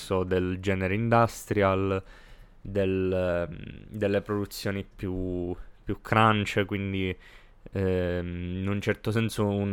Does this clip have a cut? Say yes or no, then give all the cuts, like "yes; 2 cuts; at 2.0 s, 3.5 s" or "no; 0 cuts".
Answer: no; 0 cuts